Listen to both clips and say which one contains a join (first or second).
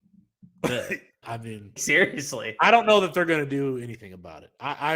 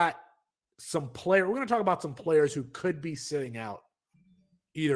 first